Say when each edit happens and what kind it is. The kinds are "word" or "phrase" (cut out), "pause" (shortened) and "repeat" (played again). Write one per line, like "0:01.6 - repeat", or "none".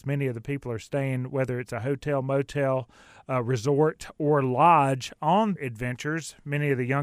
0:05.6 - word

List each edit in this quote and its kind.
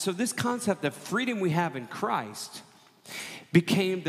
none

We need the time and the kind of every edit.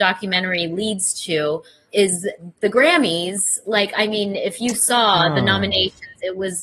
0:01.9 - word

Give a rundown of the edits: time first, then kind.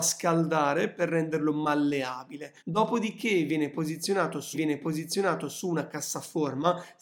0:02.6 - pause
0:04.5 - repeat

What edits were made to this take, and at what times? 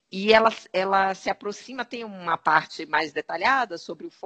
none

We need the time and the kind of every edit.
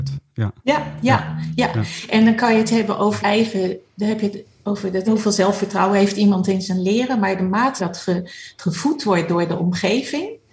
0:03.2 - word
0:05.1 - word
0:07.8 - word

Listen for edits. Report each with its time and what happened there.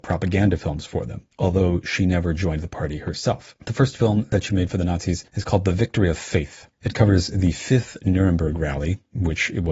0:01.3 - pause
0:03.6 - pause
0:05.3 - pause
0:06.7 - pause

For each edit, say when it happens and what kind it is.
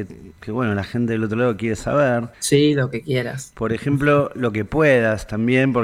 0:02.3 - pause

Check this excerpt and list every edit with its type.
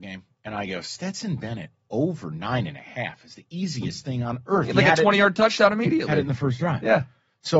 none

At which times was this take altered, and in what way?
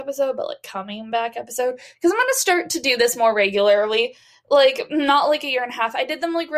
none

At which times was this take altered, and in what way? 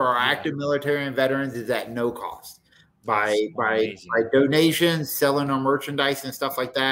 none

